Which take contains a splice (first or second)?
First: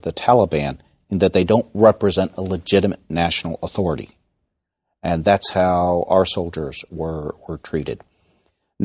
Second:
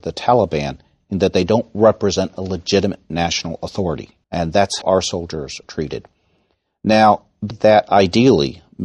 second